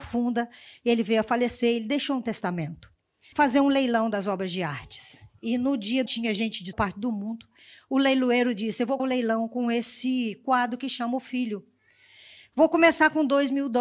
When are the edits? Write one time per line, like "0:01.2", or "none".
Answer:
0:03.3
0:06.1
0:06.7
0:09.0